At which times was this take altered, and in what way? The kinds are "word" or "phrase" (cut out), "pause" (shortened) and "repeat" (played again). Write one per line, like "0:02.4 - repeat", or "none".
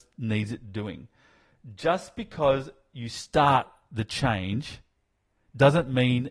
none